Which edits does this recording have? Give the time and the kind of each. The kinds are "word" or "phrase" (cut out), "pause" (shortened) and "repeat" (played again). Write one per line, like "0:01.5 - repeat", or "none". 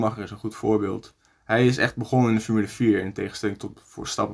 none